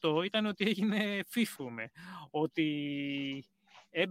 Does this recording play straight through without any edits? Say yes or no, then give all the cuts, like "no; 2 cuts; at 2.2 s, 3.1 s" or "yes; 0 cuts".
no; 1 cut; at 1.6 s